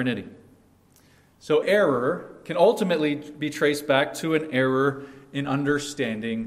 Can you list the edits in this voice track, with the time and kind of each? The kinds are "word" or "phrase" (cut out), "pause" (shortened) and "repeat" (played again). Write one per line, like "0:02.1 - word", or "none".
0:01.6 - word